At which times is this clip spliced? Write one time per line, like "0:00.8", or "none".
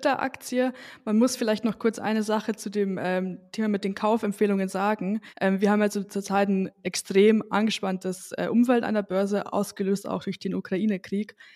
0:05.3